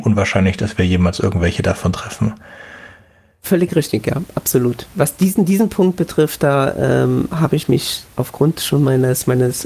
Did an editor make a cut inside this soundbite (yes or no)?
no